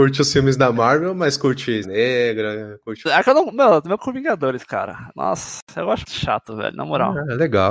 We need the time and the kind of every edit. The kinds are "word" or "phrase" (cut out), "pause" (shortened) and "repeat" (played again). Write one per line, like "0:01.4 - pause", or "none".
0:01.8 - phrase
0:03.1 - word
0:04.0 - word
0:06.0 - word